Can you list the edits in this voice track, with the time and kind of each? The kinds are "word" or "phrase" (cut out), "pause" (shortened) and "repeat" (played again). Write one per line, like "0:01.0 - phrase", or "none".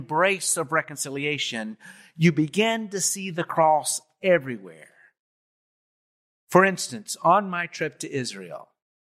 none